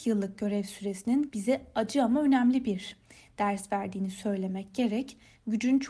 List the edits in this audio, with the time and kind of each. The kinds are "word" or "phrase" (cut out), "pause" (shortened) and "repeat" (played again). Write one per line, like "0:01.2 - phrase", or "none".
none